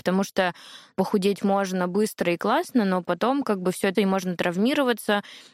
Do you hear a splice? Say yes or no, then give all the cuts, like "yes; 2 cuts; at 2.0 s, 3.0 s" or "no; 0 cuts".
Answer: yes; 1 cut; at 3.9 s